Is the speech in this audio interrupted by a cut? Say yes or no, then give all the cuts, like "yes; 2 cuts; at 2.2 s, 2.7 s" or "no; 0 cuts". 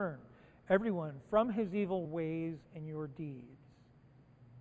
yes; 1 cut; at 2.0 s